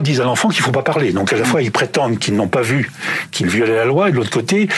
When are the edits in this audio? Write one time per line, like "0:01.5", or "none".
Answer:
none